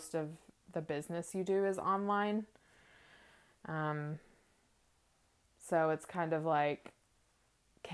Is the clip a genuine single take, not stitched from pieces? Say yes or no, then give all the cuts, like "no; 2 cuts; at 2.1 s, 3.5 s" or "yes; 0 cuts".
yes; 0 cuts